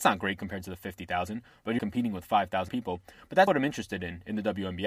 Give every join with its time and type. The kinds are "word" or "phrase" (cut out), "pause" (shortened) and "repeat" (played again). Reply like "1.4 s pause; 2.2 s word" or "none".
1.8 s word; 2.7 s word; 3.5 s word